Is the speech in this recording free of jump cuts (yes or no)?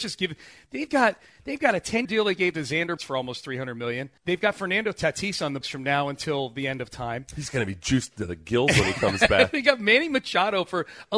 no